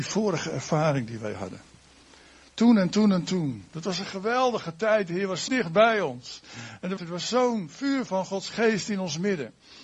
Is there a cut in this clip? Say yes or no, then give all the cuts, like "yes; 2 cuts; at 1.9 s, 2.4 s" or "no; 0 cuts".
yes; 2 cuts; at 5.5 s, 7.0 s